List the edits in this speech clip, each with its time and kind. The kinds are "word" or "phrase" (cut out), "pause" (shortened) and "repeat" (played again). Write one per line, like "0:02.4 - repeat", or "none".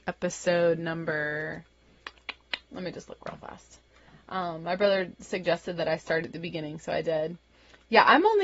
none